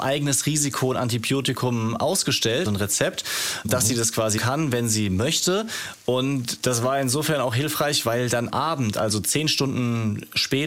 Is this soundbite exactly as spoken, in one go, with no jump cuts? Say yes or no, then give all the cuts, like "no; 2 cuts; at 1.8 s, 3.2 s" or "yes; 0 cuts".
no; 3 cuts; at 2.7 s, 4.4 s, 8.5 s